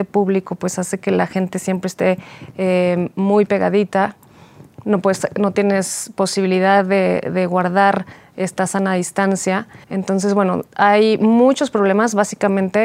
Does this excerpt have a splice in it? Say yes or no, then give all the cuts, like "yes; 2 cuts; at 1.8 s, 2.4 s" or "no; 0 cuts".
yes; 2 cuts; at 9.8 s, 10.7 s